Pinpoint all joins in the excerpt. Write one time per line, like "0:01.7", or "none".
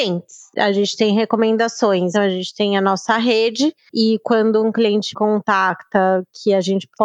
0:02.1
0:05.1